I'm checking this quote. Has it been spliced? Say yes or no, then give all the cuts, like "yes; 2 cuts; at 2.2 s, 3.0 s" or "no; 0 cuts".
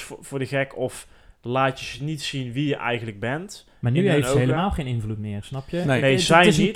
no; 0 cuts